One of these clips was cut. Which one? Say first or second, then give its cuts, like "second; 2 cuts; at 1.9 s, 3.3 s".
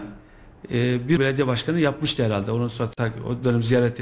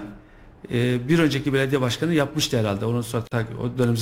first; 1 cut; at 1.2 s